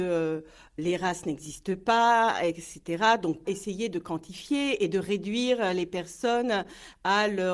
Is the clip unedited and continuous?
no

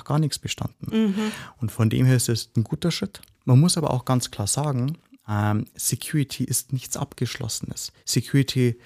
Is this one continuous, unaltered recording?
no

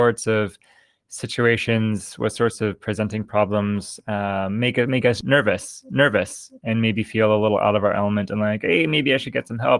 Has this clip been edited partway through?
yes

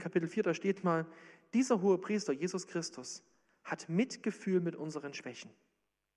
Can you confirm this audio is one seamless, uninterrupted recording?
yes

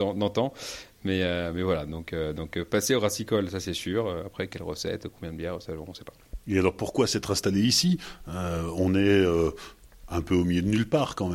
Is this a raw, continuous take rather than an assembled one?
yes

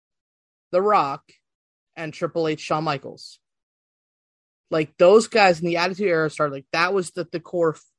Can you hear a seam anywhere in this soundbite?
no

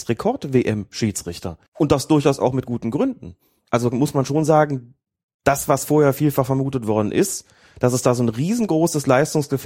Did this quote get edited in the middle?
yes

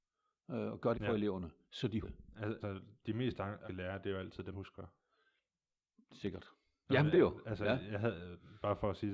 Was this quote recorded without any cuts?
no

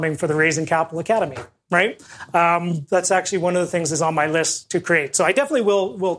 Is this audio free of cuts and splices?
yes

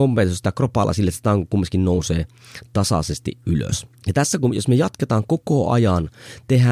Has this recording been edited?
yes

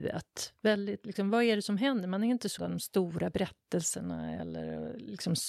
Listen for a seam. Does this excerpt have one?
yes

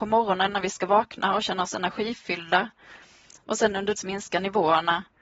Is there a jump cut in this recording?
yes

